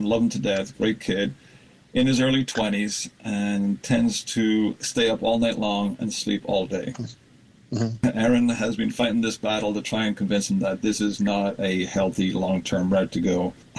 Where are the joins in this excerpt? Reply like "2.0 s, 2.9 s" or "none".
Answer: none